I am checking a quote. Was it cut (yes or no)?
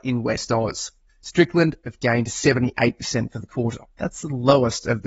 yes